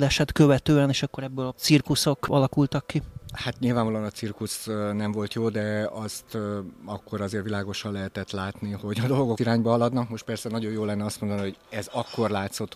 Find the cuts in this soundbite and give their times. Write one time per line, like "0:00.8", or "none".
0:01.5
0:09.4